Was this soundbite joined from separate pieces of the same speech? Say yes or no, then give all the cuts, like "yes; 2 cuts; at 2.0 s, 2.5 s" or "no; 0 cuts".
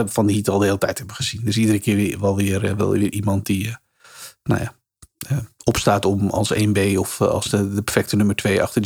no; 0 cuts